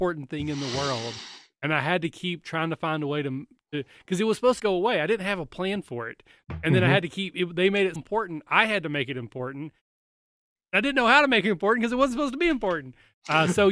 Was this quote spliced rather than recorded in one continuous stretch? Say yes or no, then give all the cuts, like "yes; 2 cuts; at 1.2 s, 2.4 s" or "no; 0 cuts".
yes; 2 cuts; at 4.6 s, 8.0 s